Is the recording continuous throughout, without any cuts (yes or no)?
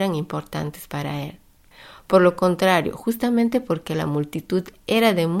yes